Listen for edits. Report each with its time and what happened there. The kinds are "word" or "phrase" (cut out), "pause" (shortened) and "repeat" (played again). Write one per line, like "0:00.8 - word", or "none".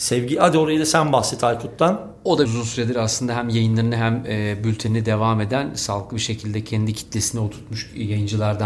0:02.4 - word

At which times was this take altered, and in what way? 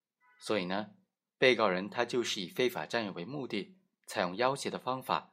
none

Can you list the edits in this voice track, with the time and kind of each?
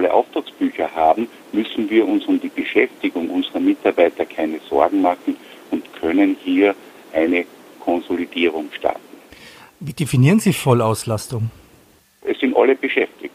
none

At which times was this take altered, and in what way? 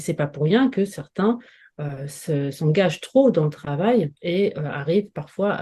none

